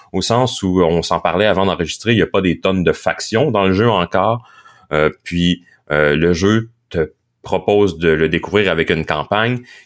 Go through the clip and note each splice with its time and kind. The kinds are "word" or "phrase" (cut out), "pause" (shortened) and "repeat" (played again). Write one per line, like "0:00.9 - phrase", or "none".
none